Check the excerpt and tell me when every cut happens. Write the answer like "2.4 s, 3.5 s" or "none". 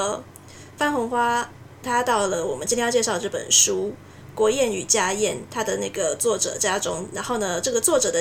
1.8 s